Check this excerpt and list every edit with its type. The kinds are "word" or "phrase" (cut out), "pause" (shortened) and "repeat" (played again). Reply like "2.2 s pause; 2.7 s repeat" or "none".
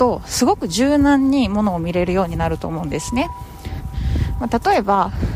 none